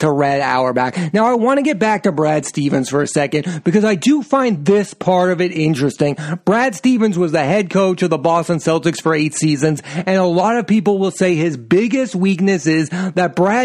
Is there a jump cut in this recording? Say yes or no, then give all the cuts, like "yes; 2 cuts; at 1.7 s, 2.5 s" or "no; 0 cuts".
no; 0 cuts